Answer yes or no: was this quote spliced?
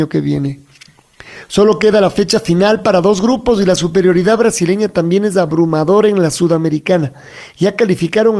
no